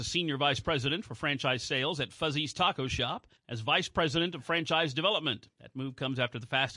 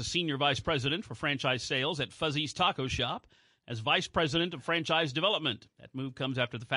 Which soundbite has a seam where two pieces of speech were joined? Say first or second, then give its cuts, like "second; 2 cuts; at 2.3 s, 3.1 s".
first; 1 cut; at 3.4 s